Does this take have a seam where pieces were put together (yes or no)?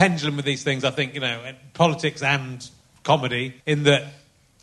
yes